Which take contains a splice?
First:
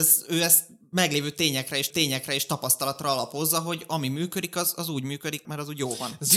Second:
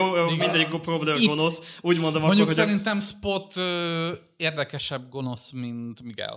first; 2 cuts; at 1.9 s, 5.4 s

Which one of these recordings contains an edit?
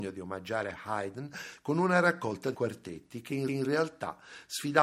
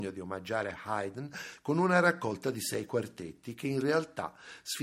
first; 2 cuts; at 2.5 s, 3.5 s

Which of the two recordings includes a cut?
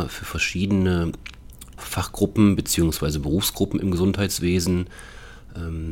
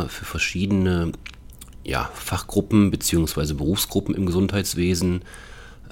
first; 1 cut; at 1.8 s

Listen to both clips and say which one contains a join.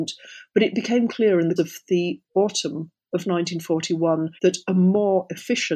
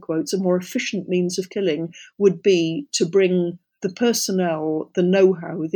first; 3 cuts; at 1.1 s, 1.6 s, 4.4 s

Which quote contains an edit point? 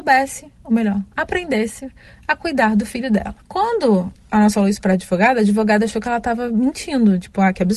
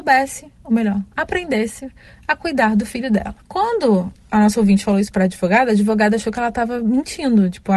first; 1 cut; at 4.5 s

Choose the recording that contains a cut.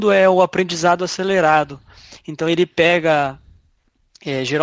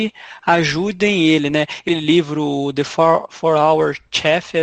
second; 1 cut; at 1.9 s

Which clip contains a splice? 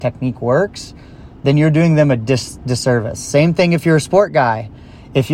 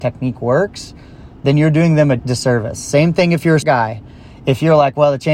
second; 2 cuts; at 2.2 s, 3.6 s

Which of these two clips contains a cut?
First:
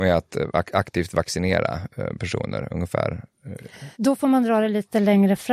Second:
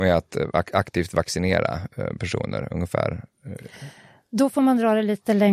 first; 1 cut; at 3.9 s

